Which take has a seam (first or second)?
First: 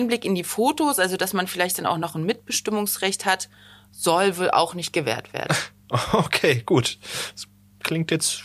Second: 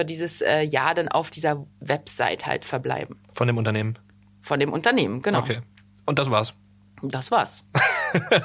second